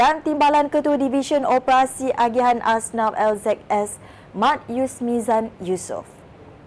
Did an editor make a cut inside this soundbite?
no; 0 cuts

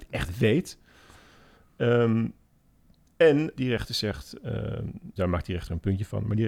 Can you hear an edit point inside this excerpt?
yes; 2 cuts; at 3.6 s, 5.2 s

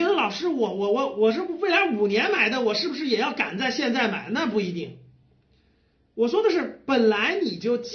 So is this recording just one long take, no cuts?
yes; 0 cuts

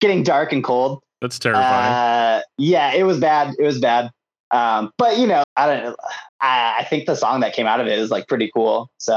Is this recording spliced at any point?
yes; 2 cuts; at 5.4 s, 6.3 s

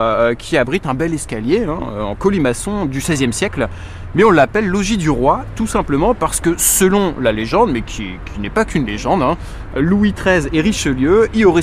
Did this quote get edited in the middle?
no; 0 cuts

